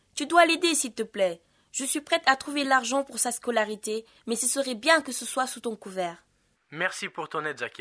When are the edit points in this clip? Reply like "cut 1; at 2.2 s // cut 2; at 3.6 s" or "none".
none

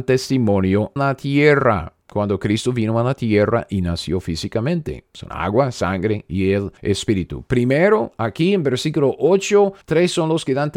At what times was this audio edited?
cut 1; at 1.0 s // cut 2; at 2.0 s // cut 3; at 6.8 s // cut 4; at 9.8 s

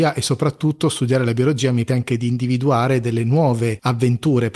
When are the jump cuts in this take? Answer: cut 1; at 1.9 s

